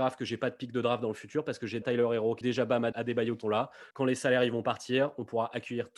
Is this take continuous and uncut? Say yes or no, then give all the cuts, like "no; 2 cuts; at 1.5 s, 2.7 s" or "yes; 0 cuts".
no; 5 cuts; at 1.8 s, 2.4 s, 2.9 s, 3.4 s, 3.9 s